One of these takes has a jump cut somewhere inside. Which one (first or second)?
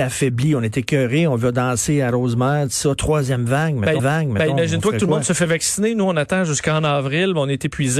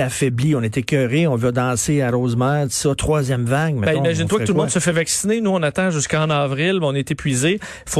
first